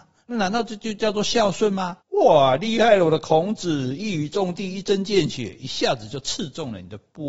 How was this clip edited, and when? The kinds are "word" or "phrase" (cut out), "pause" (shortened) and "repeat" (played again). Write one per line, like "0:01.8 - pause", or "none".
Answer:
0:02.0 - pause

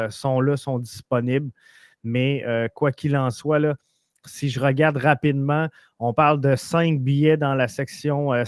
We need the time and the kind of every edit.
none

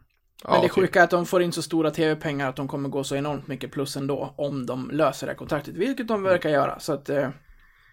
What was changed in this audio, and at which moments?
none

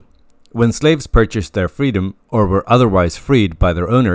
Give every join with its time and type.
none

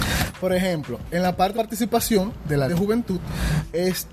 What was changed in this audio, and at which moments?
0:01.5 - word
0:02.7 - word

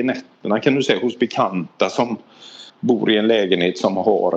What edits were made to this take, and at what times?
0:02.7 - pause

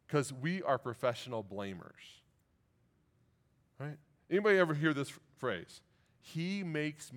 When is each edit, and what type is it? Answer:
none

